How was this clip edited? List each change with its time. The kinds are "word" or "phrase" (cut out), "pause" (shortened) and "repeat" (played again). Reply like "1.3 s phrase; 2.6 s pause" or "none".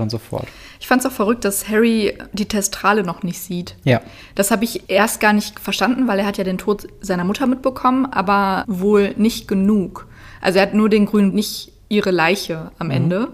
4.9 s pause; 8.6 s word; 11.3 s phrase